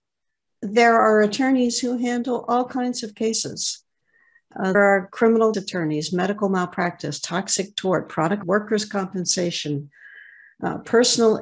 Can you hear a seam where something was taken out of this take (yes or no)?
yes